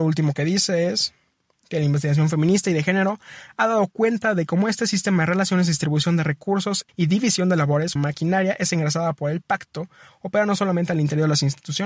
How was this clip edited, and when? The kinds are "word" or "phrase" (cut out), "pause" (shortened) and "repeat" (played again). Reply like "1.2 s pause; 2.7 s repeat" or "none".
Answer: 6.9 s word; 8.0 s word